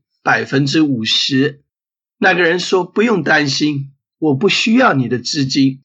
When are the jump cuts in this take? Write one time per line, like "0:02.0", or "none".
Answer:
0:01.7